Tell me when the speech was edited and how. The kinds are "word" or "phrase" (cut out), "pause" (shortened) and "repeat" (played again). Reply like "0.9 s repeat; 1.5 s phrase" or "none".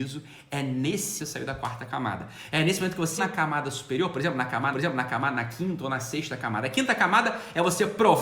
1.2 s phrase; 3.2 s word; 4.7 s repeat